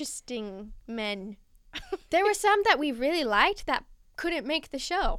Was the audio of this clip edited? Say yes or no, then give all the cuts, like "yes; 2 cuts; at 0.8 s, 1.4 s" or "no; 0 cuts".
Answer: no; 0 cuts